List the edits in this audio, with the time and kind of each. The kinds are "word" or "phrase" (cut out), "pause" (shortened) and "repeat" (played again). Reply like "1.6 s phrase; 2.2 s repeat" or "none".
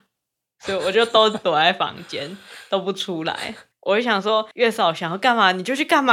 3.7 s pause; 4.5 s pause